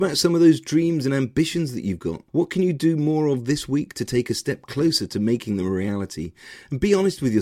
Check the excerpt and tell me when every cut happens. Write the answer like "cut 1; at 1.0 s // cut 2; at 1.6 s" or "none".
cut 1; at 2.3 s

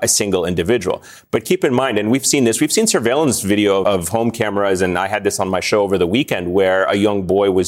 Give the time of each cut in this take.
cut 1; at 3.8 s

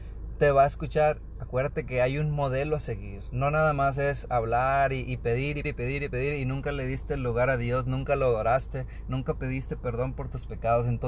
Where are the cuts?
cut 1; at 1.3 s // cut 2; at 5.6 s

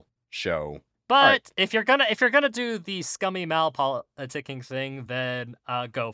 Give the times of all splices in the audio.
none

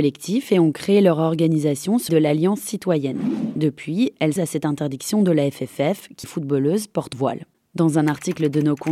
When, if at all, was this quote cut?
cut 1; at 2.1 s // cut 2; at 4.4 s // cut 3; at 6.2 s // cut 4; at 7.1 s

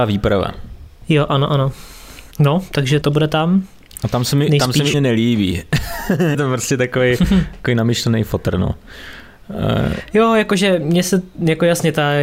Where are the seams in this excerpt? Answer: cut 1; at 2.3 s // cut 2; at 3.0 s // cut 3; at 4.9 s // cut 4; at 6.3 s

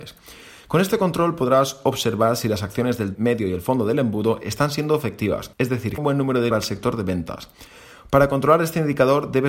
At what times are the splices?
cut 1; at 3.1 s // cut 2; at 5.5 s // cut 3; at 6.0 s // cut 4; at 6.5 s

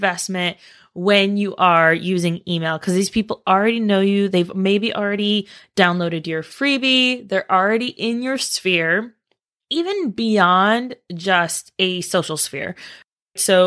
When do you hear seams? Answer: none

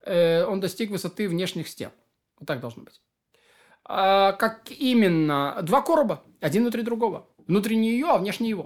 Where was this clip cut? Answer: none

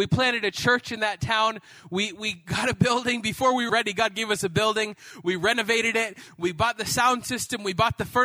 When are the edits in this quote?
cut 1; at 3.7 s

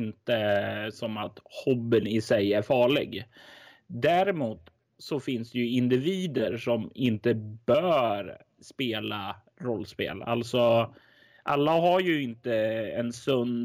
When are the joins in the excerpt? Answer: none

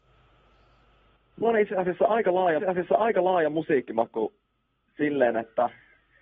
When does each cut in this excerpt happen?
cut 1; at 1.4 s // cut 2; at 2.6 s

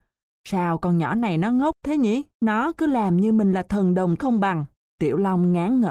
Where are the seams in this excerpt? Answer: cut 1; at 2.3 s // cut 2; at 4.2 s // cut 3; at 4.7 s

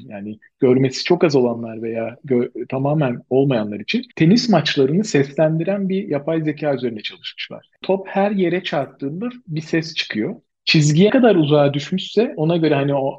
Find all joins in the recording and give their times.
cut 1; at 4.1 s // cut 2; at 11.1 s

